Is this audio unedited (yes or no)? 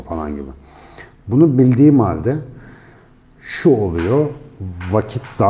yes